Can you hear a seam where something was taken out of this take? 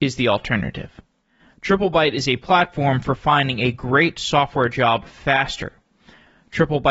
no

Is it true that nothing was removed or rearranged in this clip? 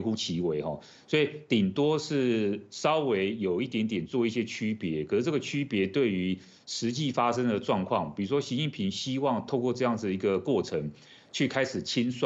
yes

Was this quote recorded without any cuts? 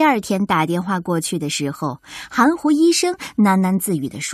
yes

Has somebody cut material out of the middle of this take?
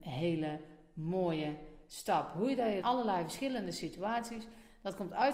yes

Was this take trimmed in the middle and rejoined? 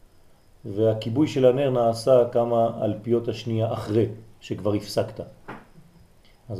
no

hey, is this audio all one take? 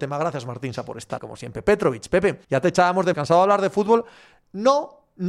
no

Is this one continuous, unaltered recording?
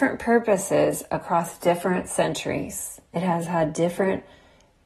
no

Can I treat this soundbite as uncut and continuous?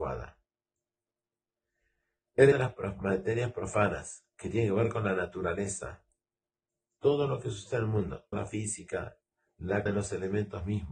no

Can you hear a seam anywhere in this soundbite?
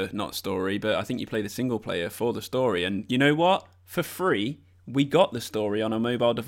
no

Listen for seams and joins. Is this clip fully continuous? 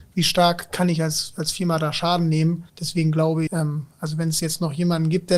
no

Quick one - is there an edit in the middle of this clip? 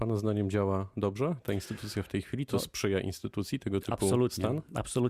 no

